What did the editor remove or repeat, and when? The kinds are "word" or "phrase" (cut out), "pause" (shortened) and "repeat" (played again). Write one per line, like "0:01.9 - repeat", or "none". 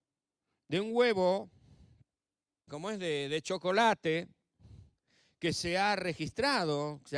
0:02.7 - word